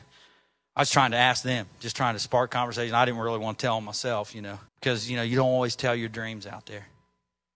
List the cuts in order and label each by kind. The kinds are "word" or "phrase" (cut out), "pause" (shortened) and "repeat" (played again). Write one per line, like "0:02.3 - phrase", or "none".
0:04.7 - pause